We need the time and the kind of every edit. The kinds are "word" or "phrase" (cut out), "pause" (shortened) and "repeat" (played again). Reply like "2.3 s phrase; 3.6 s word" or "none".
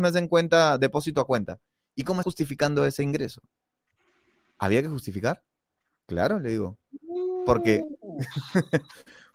2.2 s word